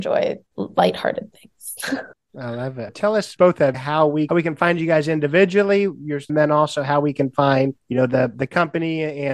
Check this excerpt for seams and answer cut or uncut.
cut